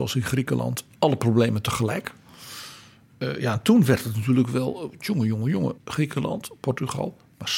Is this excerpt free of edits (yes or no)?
no